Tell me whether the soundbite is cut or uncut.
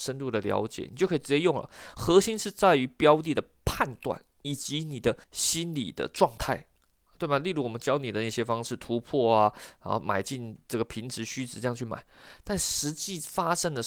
cut